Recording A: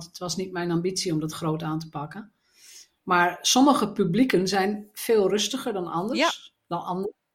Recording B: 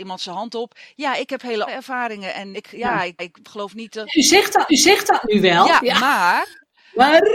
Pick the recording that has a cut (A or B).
B